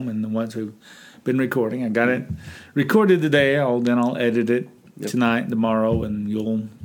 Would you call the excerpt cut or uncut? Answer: uncut